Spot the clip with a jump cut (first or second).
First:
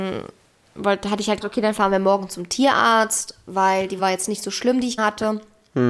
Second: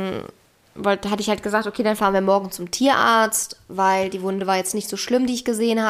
first